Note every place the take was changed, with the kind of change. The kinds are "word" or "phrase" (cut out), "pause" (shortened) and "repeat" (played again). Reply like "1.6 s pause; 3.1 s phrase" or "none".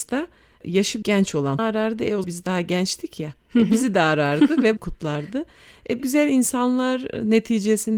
1.0 s word; 1.6 s word; 2.2 s word; 4.8 s word; 6.0 s word